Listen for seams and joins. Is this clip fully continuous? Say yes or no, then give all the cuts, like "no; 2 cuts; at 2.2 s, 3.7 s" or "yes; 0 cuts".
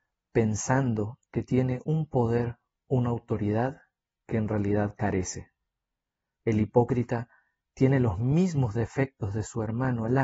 yes; 0 cuts